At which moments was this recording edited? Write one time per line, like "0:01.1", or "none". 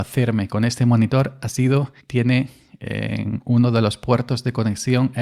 0:02.0